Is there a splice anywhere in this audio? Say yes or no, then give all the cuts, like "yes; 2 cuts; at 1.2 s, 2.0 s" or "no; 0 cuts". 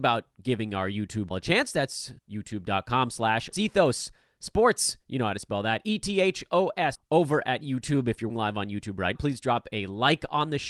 yes; 6 cuts; at 1.3 s, 2.2 s, 3.5 s, 6.9 s, 8.3 s, 9.1 s